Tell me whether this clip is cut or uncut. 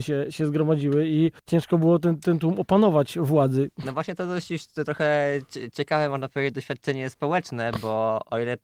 cut